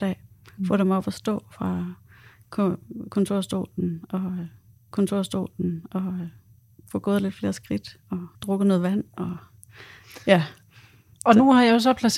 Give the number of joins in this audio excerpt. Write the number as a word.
two